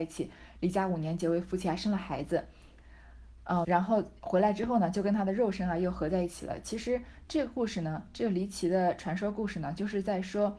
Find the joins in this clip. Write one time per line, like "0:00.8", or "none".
0:03.6